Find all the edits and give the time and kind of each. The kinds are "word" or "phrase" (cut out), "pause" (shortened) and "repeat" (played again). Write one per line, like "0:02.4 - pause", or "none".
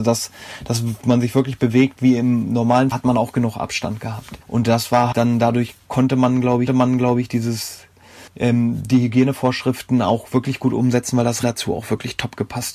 0:02.9 - phrase
0:04.4 - pause
0:05.1 - word
0:05.8 - pause
0:06.7 - repeat
0:08.3 - pause
0:11.4 - word